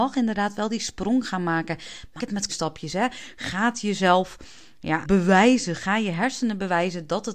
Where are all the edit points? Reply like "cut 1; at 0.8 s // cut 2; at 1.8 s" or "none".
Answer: cut 1; at 2.2 s // cut 2; at 2.5 s // cut 3; at 5.0 s